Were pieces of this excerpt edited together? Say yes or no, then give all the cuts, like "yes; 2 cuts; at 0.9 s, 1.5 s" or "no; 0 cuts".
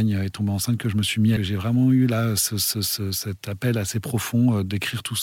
yes; 1 cut; at 1.4 s